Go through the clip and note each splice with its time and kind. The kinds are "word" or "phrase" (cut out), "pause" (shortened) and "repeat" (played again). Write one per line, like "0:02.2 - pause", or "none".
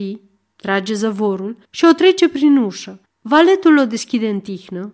0:01.6 - pause
0:03.1 - pause

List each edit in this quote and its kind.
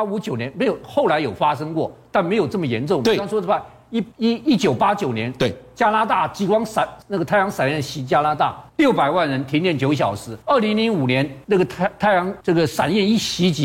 0:04.1 - pause
0:07.0 - pause
0:08.7 - pause
0:10.4 - pause
0:11.4 - pause
0:12.4 - pause

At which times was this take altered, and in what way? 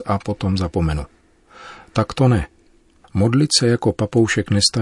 none

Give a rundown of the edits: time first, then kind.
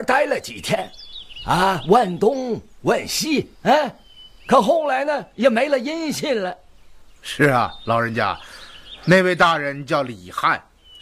0:03.6 - pause

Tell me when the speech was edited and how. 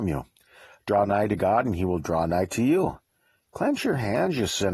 none

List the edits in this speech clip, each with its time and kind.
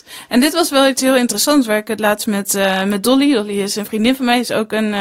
none

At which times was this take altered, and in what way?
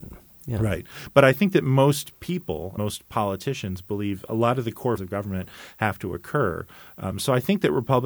0:02.8 - word
0:05.0 - word

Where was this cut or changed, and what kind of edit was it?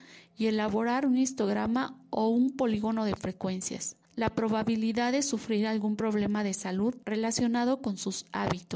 0:04.1 - pause
0:07.0 - pause

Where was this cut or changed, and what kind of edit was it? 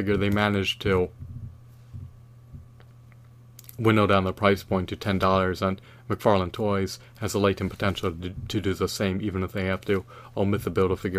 none

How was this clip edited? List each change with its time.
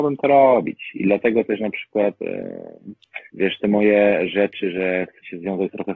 0:03.3 - pause

